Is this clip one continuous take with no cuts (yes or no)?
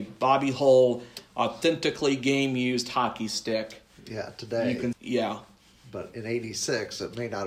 no